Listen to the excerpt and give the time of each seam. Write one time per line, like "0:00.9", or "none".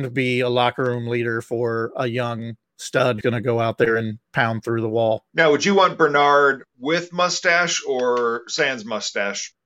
0:03.2
0:05.3